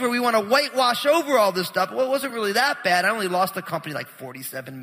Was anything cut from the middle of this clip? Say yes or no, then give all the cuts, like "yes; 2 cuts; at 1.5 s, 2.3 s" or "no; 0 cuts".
no; 0 cuts